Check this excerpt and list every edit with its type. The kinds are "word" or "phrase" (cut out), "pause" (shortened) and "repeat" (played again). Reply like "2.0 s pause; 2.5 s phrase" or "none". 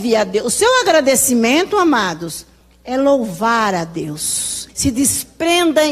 2.6 s pause; 4.7 s pause